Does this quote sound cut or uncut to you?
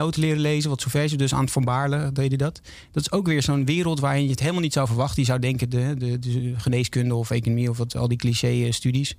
uncut